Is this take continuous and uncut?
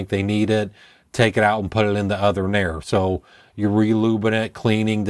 yes; 0 cuts

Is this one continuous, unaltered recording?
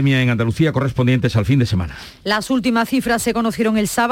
yes; 0 cuts

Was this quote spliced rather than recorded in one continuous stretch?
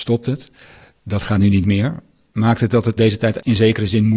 yes; 1 cut; at 3.0 s

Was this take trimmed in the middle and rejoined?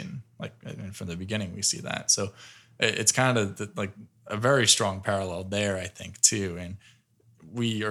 no; 0 cuts

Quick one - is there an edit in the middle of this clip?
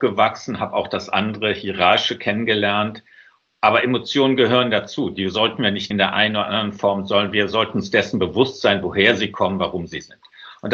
yes; 1 cut; at 5.9 s

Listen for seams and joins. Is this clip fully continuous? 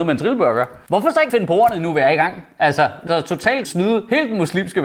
no; 3 cuts; at 1.3 s, 3.1 s, 3.6 s

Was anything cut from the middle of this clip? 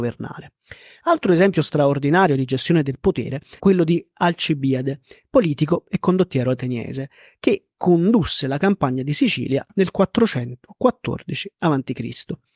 yes; 1 cut; at 3.6 s

